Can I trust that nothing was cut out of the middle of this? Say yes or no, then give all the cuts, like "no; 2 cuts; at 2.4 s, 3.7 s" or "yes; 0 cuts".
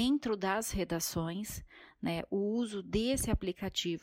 yes; 0 cuts